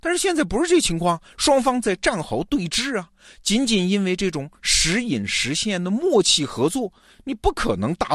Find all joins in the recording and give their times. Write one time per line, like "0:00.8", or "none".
none